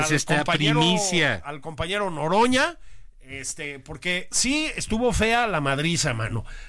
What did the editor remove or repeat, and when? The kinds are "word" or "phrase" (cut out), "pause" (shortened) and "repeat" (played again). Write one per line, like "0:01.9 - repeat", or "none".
none